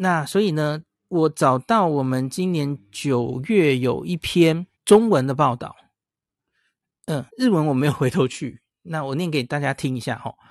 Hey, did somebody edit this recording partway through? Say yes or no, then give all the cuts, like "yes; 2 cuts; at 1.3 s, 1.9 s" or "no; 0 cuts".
yes; 3 cuts; at 0.9 s, 4.7 s, 7.3 s